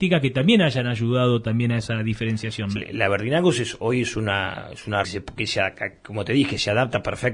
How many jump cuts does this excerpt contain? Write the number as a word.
two